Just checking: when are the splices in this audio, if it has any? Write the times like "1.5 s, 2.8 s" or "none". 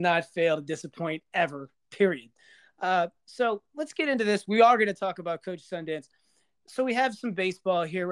none